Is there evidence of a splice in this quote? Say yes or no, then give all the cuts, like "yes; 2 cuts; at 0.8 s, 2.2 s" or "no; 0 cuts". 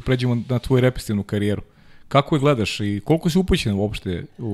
no; 0 cuts